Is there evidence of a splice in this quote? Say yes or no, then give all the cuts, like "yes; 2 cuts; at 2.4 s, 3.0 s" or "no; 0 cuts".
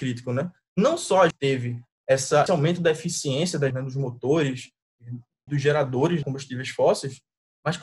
yes; 5 cuts; at 1.3 s, 2.5 s, 3.7 s, 5.5 s, 6.2 s